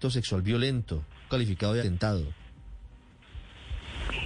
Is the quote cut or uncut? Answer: cut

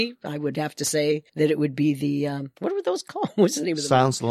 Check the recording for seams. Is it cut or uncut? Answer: cut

